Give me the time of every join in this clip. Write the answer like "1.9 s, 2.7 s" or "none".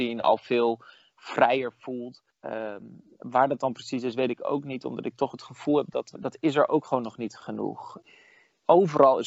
2.3 s